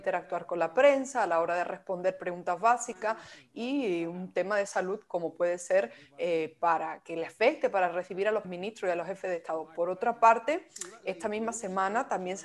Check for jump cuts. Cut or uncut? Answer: cut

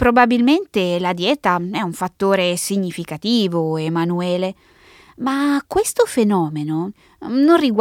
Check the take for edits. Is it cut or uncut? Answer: uncut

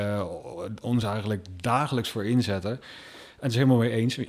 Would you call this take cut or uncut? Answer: uncut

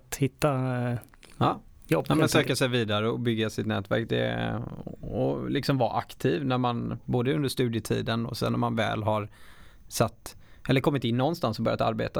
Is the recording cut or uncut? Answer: uncut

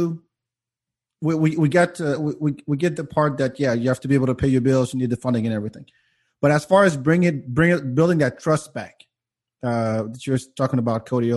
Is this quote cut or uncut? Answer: uncut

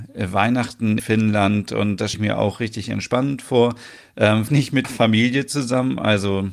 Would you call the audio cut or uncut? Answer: cut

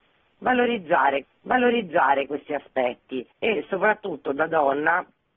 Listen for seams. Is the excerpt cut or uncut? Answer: cut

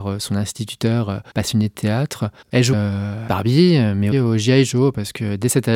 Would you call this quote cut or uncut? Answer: cut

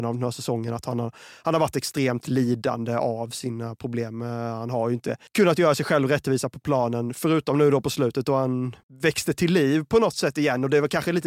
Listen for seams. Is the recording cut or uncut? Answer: cut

